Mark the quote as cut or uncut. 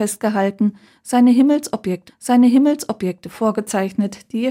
cut